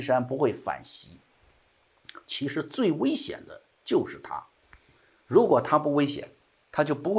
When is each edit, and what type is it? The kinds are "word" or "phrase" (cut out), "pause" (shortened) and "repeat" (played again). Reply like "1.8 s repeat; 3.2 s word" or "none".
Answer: none